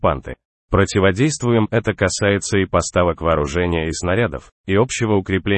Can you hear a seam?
no; 0 cuts

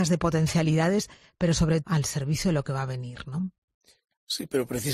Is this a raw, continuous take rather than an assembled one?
no; 1 cut; at 1.8 s

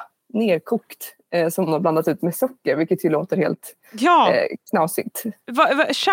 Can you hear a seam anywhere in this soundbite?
yes; 2 cuts; at 1.7 s, 4.6 s

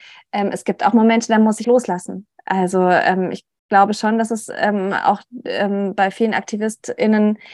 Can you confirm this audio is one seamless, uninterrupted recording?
no; 1 cut; at 1.6 s

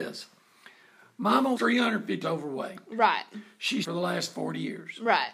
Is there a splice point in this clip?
yes; 3 cuts; at 1.5 s, 2.2 s, 3.8 s

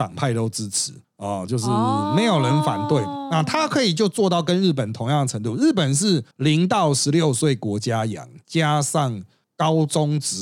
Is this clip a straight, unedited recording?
no; 1 cut; at 6.3 s

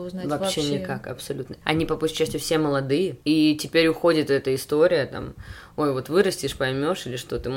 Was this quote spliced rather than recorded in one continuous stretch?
yes; 2 cuts; at 1.6 s, 3.2 s

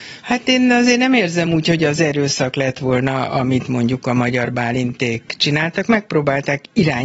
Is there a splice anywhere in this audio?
no; 0 cuts

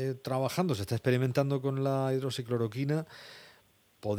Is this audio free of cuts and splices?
yes; 0 cuts

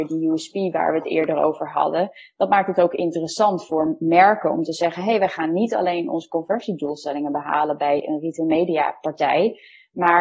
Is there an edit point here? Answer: no; 0 cuts

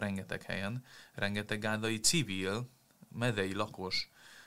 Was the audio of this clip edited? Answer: no; 0 cuts

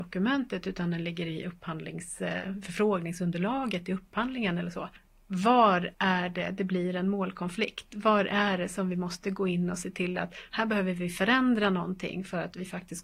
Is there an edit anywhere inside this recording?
yes; 1 cut; at 5.9 s

